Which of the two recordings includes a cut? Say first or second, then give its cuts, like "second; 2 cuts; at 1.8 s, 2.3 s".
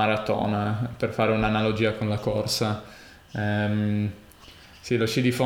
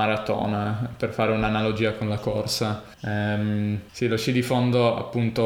second; 2 cuts; at 2.9 s, 3.9 s